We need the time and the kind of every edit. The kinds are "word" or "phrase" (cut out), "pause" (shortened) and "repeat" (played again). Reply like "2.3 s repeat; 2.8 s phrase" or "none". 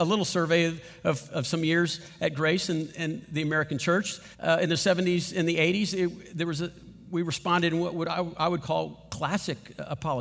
4.3 s pause

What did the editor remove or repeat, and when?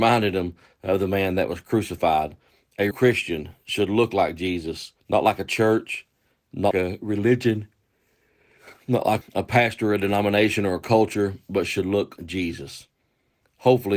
2.9 s word; 5.0 s pause; 6.7 s word; 8.8 s pause; 9.2 s word; 12.2 s word

